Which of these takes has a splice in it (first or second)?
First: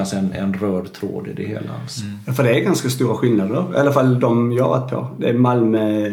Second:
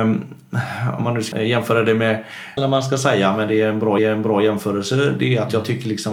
second